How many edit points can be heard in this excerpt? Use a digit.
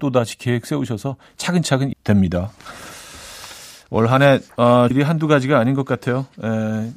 2